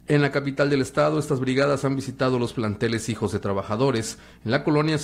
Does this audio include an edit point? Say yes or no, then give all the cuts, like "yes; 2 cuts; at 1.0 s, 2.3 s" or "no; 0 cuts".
no; 0 cuts